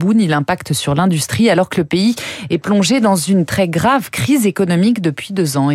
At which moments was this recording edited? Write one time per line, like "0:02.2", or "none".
none